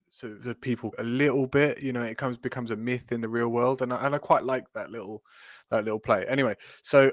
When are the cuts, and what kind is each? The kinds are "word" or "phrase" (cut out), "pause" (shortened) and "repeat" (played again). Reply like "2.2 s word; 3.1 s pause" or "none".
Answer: 0.9 s phrase